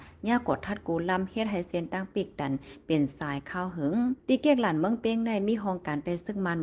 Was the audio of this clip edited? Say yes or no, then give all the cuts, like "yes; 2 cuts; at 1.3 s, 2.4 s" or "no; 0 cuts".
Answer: yes; 1 cut; at 4.2 s